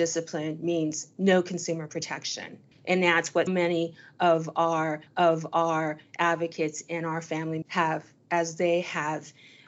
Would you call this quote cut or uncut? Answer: cut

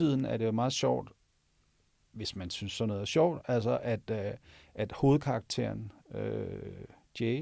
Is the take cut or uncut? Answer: uncut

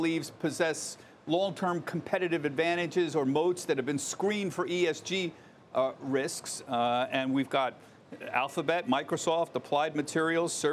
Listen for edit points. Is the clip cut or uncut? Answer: uncut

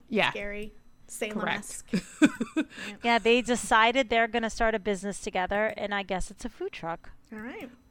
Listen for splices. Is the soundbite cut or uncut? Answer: uncut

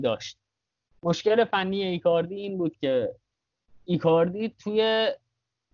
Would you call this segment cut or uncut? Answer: uncut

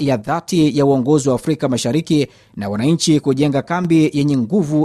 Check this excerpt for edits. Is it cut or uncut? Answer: uncut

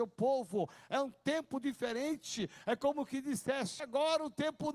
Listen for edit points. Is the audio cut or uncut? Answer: cut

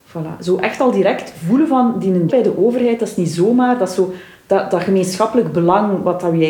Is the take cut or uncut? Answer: cut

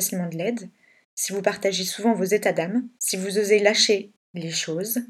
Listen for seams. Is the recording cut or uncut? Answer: cut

